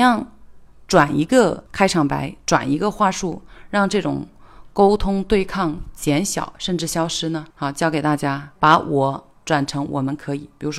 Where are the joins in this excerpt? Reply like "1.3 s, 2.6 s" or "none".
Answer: 1.7 s, 7.5 s, 8.6 s